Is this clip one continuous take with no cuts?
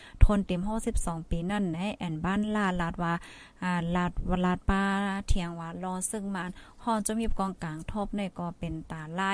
yes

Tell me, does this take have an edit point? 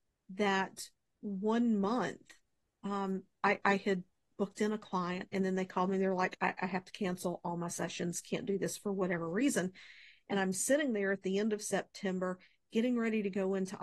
no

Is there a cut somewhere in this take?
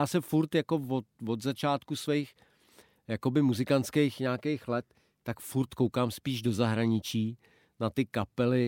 no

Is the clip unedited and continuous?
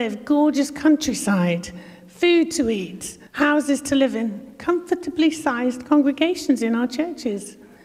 no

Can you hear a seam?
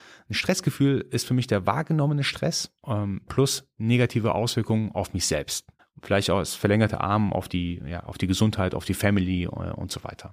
yes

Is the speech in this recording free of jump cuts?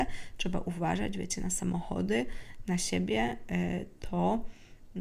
yes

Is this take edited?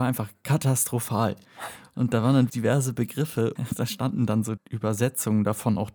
yes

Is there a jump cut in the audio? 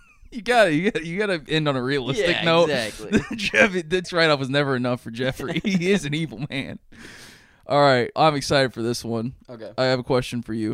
yes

